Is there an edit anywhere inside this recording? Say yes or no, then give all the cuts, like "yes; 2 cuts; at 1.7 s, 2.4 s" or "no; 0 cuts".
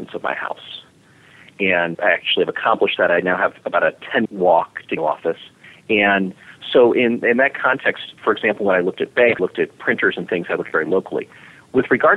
yes; 6 cuts; at 1.9 s, 4.3 s, 5.0 s, 5.6 s, 8.2 s, 9.4 s